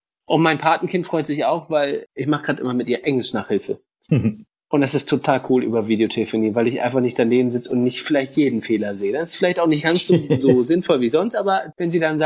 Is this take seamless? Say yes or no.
yes